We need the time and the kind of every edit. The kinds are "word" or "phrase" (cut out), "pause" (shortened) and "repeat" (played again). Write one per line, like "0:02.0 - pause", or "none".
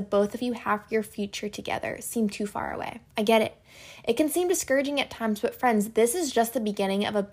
0:03.1 - pause